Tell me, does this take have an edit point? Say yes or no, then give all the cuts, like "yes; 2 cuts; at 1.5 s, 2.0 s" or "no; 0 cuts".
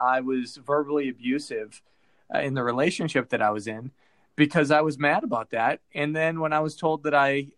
no; 0 cuts